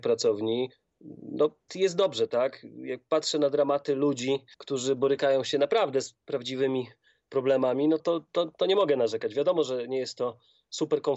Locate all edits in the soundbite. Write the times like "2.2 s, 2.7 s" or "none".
1.7 s, 4.5 s, 8.0 s